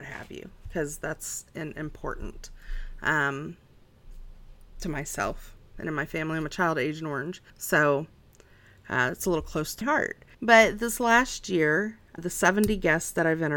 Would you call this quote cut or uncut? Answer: cut